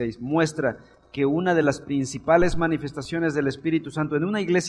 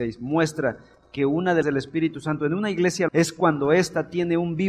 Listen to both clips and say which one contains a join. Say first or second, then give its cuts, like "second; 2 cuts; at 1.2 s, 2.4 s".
second; 2 cuts; at 1.6 s, 3.1 s